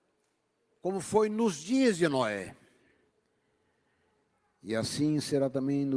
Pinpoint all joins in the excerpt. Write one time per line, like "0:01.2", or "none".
none